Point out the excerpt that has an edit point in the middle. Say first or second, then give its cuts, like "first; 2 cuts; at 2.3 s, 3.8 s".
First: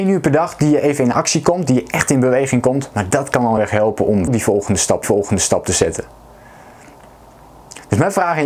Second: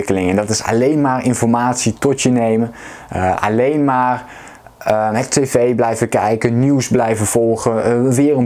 first; 3 cuts; at 3.6 s, 4.3 s, 5.0 s